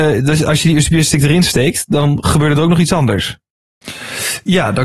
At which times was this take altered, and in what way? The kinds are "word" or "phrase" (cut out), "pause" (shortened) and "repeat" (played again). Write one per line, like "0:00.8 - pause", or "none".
none